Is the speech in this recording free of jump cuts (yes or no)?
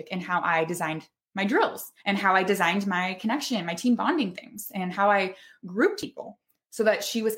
no